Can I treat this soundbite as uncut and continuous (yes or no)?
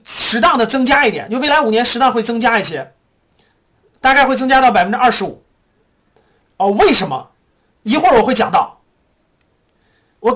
yes